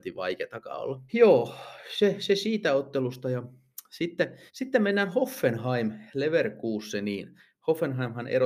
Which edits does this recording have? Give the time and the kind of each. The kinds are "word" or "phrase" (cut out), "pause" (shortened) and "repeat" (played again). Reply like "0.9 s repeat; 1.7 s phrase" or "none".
1.1 s pause; 4.5 s pause